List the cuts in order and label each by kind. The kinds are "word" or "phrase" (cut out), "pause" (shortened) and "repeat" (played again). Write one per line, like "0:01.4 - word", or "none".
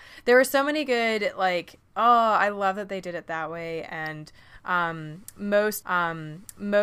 0:05.8 - repeat